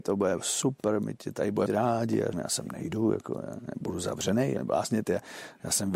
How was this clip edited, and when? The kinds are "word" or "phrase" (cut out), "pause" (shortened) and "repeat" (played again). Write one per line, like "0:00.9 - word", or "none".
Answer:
0:01.7 - word
0:02.3 - word
0:04.6 - word